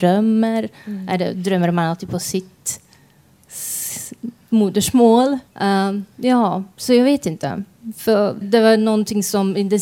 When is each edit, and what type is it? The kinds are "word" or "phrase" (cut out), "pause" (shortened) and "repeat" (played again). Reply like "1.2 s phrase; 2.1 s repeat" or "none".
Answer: 5.5 s pause; 8.4 s word